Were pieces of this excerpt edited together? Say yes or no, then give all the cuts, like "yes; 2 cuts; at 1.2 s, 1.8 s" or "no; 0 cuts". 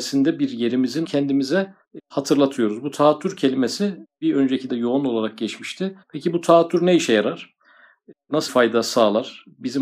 yes; 4 cuts; at 1.0 s, 4.7 s, 6.0 s, 8.5 s